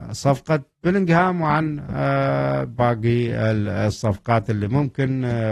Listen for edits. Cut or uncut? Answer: uncut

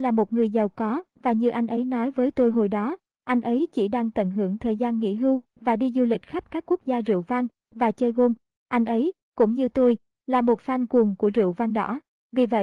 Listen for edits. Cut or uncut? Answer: uncut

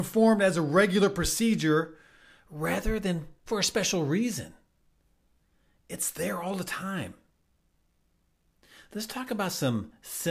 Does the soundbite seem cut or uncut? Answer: cut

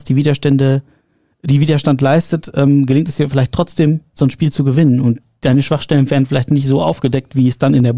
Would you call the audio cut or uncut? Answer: uncut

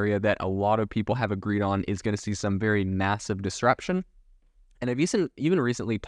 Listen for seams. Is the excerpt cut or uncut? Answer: uncut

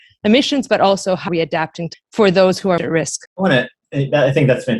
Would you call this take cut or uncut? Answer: cut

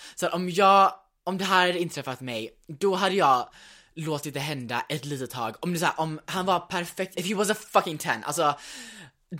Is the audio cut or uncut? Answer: cut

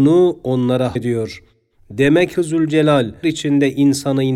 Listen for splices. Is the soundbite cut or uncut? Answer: cut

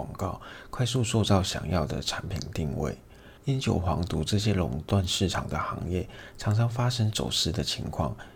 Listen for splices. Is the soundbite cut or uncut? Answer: cut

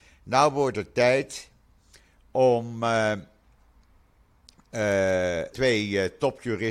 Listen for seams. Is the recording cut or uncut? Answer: cut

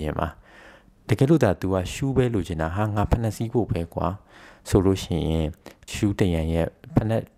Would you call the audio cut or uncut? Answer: cut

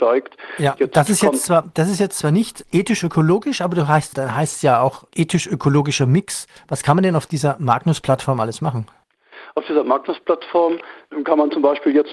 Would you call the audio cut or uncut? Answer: uncut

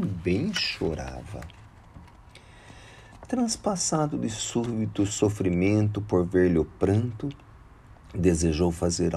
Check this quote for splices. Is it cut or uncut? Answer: uncut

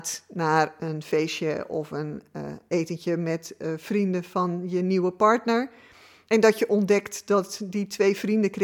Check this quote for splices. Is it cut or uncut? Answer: uncut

